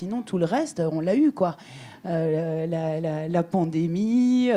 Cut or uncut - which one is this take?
cut